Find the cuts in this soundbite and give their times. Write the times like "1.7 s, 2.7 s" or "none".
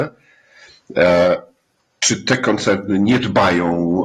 none